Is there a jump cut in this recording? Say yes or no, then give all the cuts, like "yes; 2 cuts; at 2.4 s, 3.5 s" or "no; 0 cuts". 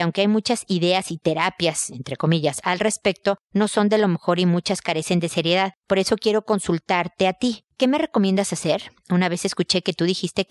no; 0 cuts